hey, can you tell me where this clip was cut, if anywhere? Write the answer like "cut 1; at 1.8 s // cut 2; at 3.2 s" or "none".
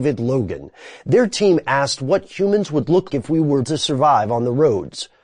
cut 1; at 3.1 s // cut 2; at 3.6 s